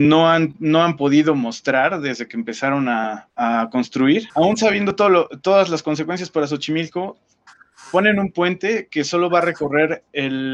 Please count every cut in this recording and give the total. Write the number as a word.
zero